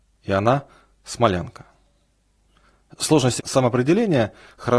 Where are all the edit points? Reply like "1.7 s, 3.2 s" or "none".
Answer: 3.4 s